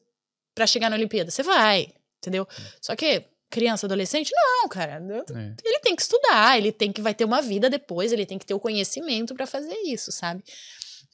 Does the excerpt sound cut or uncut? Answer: cut